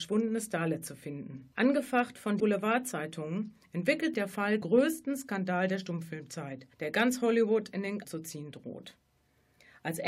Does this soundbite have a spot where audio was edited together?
yes; 6 cuts; at 1.5 s, 2.4 s, 4.1 s, 4.6 s, 6.7 s, 8.0 s

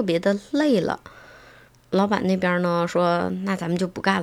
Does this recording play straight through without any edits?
yes; 0 cuts

